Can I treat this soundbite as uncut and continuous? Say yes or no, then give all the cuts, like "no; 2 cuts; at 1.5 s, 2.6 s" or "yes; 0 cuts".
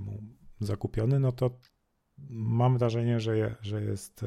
yes; 0 cuts